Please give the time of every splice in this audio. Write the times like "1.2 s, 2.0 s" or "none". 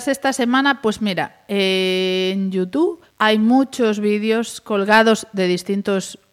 3.1 s